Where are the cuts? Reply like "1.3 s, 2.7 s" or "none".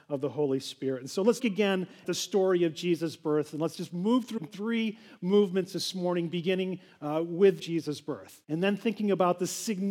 1.4 s, 2.0 s, 4.4 s, 7.6 s, 8.4 s